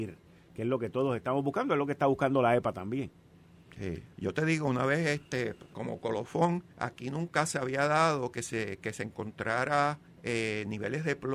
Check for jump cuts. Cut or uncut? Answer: cut